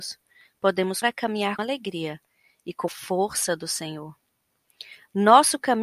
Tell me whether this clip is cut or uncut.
cut